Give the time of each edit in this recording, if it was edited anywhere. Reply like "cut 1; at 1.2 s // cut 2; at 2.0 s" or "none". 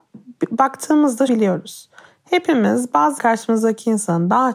cut 1; at 1.3 s // cut 2; at 3.2 s